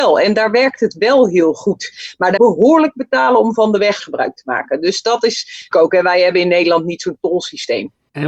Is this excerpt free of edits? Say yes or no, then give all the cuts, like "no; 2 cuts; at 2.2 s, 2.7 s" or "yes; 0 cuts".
no; 3 cuts; at 2.4 s, 4.0 s, 5.7 s